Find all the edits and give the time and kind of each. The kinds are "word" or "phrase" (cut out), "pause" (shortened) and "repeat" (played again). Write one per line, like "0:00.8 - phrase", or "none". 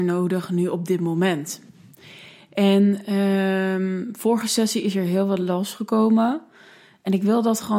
none